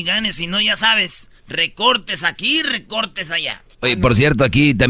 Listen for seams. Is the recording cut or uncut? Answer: cut